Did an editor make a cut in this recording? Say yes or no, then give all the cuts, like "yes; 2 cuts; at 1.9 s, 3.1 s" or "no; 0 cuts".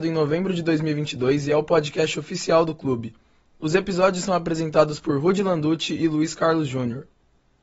no; 0 cuts